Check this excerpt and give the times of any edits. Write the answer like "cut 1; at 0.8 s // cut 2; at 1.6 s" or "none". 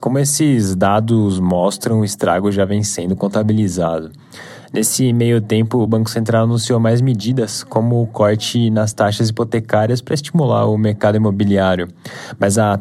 none